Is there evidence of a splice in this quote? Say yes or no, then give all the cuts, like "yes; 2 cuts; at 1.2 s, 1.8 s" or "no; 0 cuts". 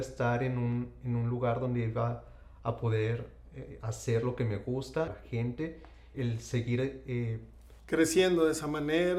yes; 2 cuts; at 5.1 s, 6.1 s